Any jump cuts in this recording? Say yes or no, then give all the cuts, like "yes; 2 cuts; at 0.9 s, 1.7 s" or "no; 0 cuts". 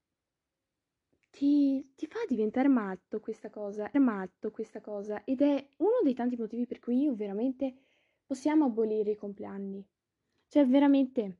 yes; 1 cut; at 3.9 s